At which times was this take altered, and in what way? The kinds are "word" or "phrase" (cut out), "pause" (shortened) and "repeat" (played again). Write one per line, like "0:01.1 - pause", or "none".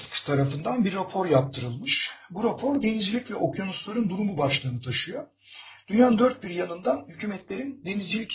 none